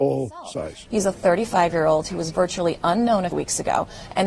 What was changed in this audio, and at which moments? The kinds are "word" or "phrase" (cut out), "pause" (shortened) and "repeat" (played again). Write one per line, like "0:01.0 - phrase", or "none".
0:03.3 - word